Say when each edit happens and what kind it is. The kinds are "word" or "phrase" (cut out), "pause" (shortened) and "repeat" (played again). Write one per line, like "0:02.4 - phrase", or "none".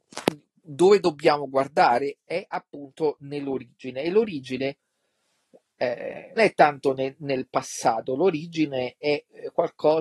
0:06.4 - word